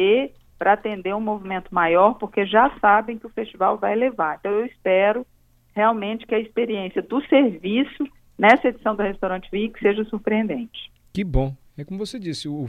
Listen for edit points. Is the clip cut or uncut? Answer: uncut